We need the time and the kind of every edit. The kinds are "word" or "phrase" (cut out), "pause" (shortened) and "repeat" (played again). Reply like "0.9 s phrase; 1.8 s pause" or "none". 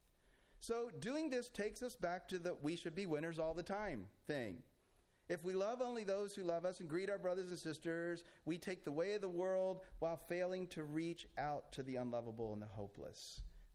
none

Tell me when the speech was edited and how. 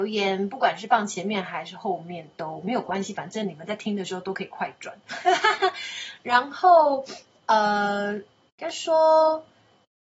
none

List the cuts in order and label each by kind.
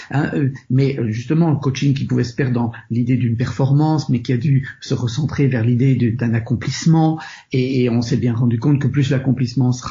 none

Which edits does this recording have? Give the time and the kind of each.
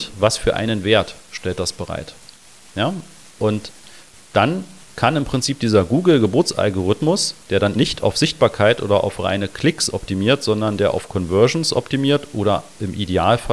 7.4 s pause; 7.7 s word

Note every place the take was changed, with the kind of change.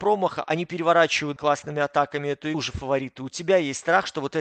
1.4 s word; 2.5 s phrase

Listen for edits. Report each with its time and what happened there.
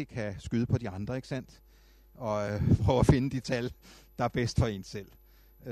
none

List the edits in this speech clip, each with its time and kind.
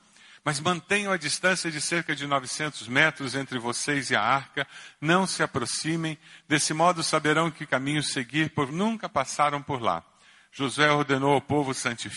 8.7 s word

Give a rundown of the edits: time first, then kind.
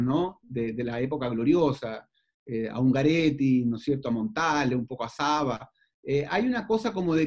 none

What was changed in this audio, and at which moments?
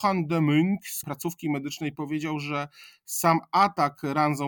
1.0 s phrase

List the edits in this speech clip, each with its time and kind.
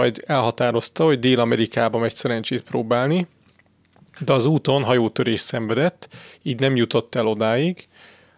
none

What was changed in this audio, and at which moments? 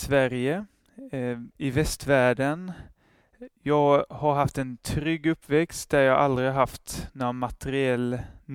1.5 s pause

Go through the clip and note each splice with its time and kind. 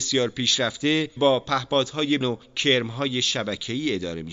1.2 s word; 2.2 s word

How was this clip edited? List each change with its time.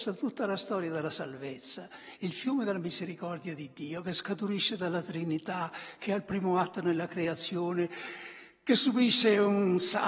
none

